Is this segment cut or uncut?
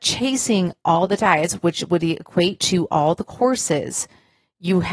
uncut